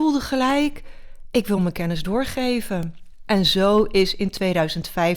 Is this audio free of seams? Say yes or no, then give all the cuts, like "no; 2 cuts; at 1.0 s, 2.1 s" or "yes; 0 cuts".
yes; 0 cuts